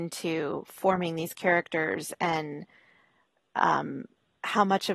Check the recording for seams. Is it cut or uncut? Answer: uncut